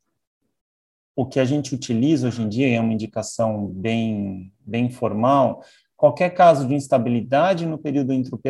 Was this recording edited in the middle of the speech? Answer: no; 0 cuts

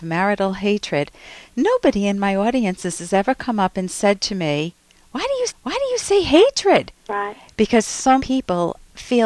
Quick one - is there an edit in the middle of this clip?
yes; 3 cuts; at 5.5 s, 7.0 s, 8.2 s

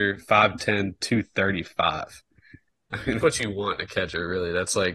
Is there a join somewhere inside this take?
yes; 1 cut; at 3.2 s

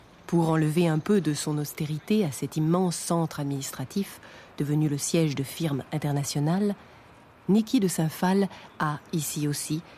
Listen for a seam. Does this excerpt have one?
no; 0 cuts

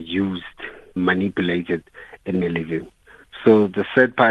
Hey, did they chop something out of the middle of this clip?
yes; 2 cuts; at 1.0 s, 2.4 s

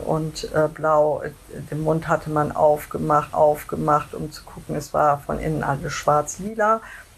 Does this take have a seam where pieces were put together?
yes; 1 cut; at 3.3 s

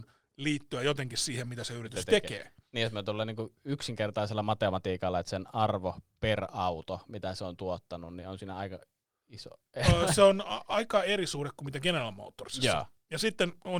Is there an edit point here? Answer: no; 0 cuts

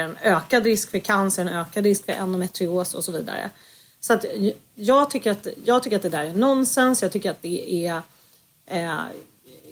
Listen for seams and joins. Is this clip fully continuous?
yes; 0 cuts

